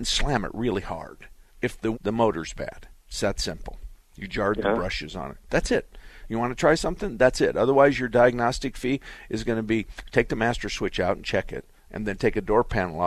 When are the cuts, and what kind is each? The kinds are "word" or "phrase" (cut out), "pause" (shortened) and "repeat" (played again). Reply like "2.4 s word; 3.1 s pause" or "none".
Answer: 1.5 s pause; 1.9 s phrase; 4.3 s word